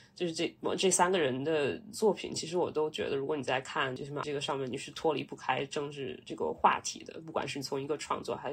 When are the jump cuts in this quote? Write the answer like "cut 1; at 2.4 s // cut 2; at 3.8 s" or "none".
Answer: cut 1; at 4.2 s